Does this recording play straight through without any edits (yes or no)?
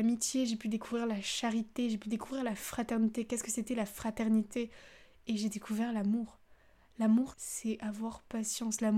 no